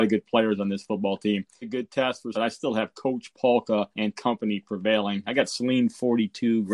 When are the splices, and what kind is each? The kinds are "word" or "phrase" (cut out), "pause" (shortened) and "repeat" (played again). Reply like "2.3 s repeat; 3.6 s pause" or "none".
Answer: 1.6 s word; 2.3 s word; 3.9 s pause